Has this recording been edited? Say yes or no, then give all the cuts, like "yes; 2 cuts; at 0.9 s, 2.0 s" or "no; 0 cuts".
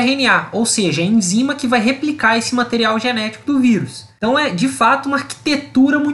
no; 0 cuts